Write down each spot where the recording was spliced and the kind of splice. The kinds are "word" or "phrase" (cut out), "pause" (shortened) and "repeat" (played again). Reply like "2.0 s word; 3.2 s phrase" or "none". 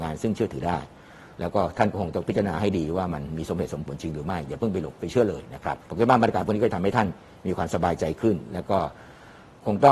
5.8 s pause